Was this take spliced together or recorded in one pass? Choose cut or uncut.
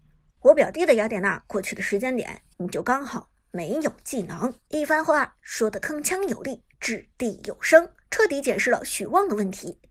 cut